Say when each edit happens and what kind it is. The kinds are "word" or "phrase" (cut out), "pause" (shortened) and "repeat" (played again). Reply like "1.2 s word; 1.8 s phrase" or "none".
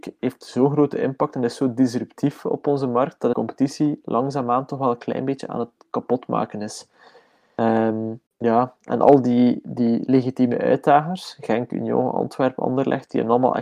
3.3 s phrase; 8.3 s pause